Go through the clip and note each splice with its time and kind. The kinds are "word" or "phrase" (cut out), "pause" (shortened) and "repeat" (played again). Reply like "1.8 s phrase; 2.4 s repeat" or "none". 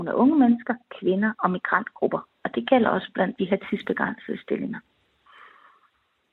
none